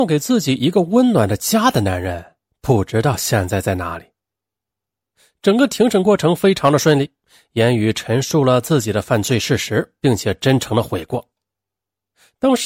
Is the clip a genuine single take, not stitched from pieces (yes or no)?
yes